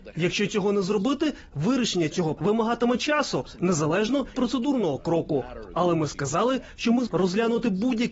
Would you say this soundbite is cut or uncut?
cut